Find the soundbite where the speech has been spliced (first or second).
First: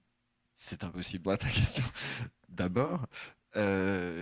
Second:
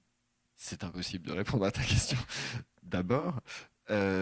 first